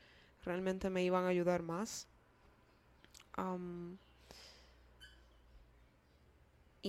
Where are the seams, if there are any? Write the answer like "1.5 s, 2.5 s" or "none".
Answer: none